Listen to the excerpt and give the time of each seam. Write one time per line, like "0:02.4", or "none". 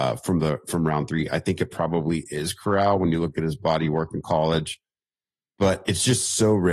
none